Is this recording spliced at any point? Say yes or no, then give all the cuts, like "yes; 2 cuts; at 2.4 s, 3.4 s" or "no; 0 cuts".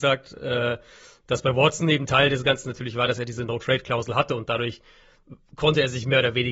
no; 0 cuts